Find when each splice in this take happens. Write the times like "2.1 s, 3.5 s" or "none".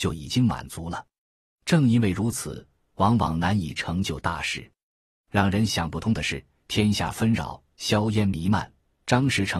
none